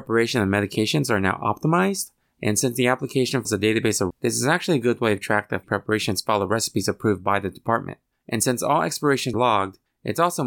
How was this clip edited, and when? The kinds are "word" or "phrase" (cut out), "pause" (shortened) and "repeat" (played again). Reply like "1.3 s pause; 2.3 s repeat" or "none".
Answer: 3.5 s word; 4.1 s word; 5.2 s word; 5.6 s word; 9.3 s word